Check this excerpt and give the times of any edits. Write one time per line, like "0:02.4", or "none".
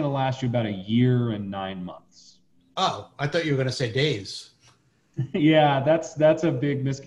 none